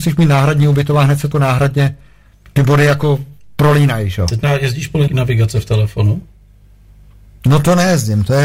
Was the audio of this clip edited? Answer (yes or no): yes